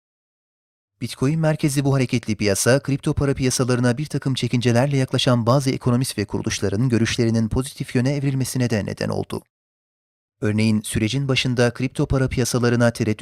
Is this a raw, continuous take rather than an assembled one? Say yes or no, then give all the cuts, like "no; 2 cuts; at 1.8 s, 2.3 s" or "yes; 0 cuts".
yes; 0 cuts